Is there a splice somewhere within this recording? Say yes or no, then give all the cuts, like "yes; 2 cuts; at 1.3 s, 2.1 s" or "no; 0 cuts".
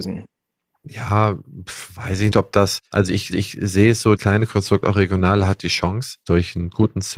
yes; 4 cuts; at 2.3 s, 2.9 s, 3.3 s, 4.2 s